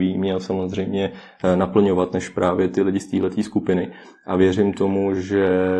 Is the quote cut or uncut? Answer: uncut